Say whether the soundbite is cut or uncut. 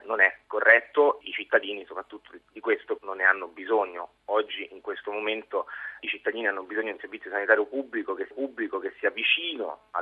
cut